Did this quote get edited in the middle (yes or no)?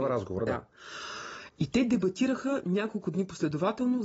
no